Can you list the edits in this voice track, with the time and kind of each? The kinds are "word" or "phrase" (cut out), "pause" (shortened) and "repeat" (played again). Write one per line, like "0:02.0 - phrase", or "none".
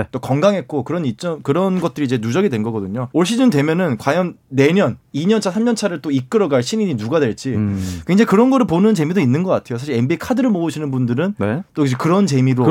0:03.1 - pause